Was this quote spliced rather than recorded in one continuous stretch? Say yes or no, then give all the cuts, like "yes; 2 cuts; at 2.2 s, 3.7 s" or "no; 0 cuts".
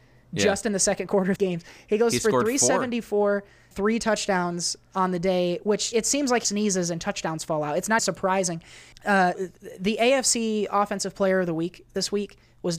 yes; 6 cuts; at 1.4 s, 3.7 s, 5.9 s, 6.4 s, 8.0 s, 9.3 s